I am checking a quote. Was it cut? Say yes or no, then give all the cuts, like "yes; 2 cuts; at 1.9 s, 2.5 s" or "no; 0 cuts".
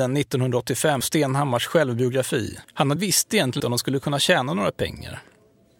yes; 4 cuts; at 1.0 s, 2.6 s, 3.0 s, 3.6 s